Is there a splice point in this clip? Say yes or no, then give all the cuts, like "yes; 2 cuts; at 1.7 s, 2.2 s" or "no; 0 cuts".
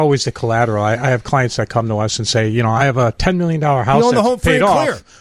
no; 0 cuts